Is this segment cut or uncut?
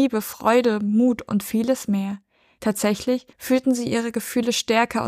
cut